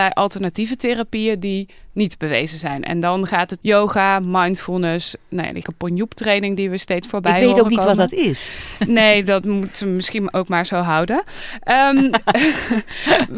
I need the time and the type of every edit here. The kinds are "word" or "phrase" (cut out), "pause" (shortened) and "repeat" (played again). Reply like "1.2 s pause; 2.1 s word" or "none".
3.6 s word; 5.6 s word